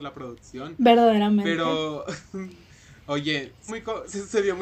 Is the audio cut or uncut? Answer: cut